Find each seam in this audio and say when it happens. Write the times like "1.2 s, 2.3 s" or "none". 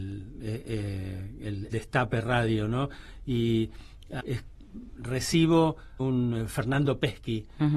1.7 s, 4.2 s, 6.0 s